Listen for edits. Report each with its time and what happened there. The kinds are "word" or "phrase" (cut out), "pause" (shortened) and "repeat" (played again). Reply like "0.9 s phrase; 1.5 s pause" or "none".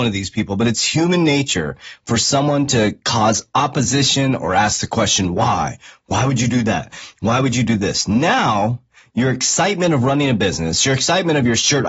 none